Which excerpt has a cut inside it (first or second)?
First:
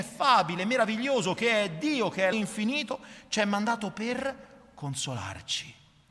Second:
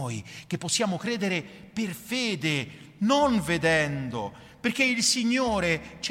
first